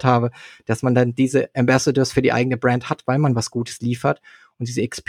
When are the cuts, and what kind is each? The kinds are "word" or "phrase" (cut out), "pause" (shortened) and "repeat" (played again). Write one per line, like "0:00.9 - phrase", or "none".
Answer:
none